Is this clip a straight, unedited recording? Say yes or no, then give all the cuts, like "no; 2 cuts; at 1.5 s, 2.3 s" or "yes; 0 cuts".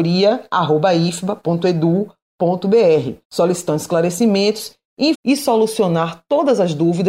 no; 2 cuts; at 3.2 s, 5.1 s